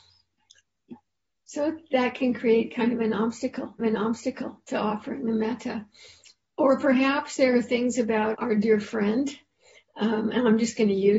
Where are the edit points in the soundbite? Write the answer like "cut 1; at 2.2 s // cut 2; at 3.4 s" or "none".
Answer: cut 1; at 3.8 s // cut 2; at 8.3 s